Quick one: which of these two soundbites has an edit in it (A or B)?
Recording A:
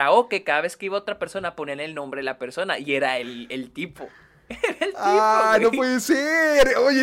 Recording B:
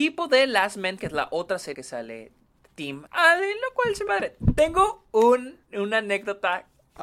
B